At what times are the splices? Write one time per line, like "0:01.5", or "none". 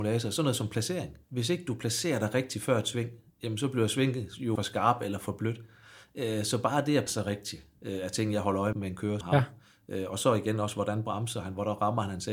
0:01.2
0:04.6
0:07.1
0:07.8
0:08.7
0:09.2